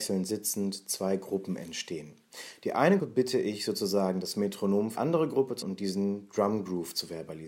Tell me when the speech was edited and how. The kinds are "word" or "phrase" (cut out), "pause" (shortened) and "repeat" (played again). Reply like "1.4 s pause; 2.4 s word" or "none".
3.0 s word; 4.9 s word; 5.6 s word